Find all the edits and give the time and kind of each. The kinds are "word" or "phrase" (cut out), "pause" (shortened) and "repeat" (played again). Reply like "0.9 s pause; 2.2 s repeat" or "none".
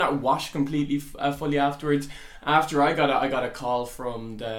none